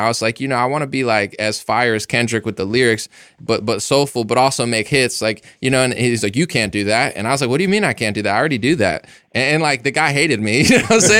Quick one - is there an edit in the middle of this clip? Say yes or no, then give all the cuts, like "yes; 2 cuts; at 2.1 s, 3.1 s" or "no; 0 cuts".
no; 0 cuts